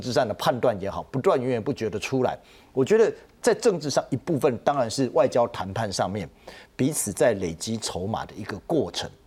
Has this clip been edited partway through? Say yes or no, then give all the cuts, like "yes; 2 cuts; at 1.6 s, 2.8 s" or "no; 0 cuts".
no; 0 cuts